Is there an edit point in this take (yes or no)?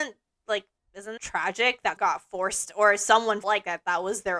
yes